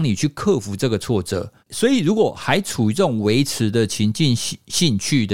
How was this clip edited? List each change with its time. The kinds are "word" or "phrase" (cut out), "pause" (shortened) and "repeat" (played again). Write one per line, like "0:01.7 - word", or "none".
0:01.6 - pause

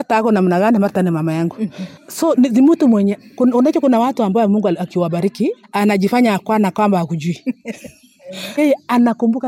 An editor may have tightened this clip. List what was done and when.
0:02.0 - pause
0:05.6 - pause
0:08.6 - word

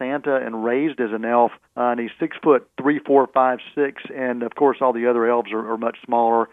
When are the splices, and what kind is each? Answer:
0:02.7 - pause

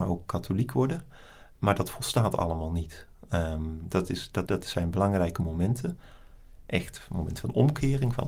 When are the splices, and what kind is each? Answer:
0:04.5 - word

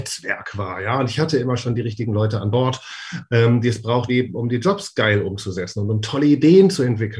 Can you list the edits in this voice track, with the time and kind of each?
0:04.1 - word

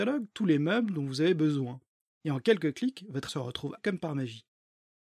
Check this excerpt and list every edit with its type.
0:03.3 - word
0:03.8 - word

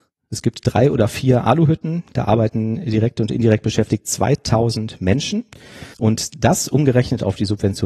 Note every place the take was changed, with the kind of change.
0:05.9 - pause

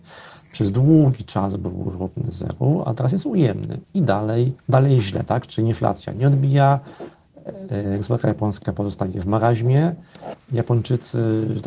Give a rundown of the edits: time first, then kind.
0:03.8 - pause
0:04.6 - pause

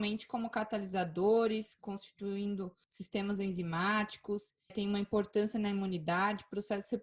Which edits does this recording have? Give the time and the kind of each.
0:02.8 - pause
0:04.7 - word

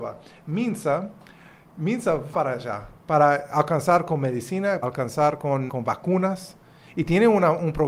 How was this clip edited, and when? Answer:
0:02.3 - word
0:03.0 - pause
0:04.8 - word
0:05.7 - word

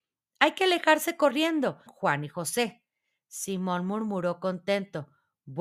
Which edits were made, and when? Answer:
0:01.9 - word

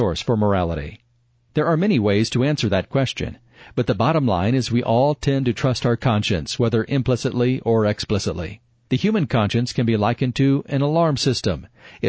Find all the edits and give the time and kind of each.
none

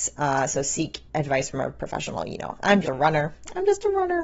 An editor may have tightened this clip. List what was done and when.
0:01.1 - pause
0:01.8 - word
0:02.8 - word

